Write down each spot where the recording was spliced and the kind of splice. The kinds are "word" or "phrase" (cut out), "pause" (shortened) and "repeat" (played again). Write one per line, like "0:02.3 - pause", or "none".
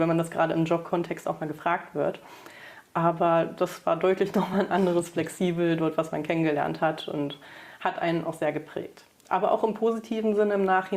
none